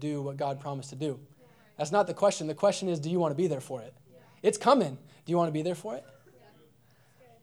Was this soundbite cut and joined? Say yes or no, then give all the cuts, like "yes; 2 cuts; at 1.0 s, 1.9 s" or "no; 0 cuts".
no; 0 cuts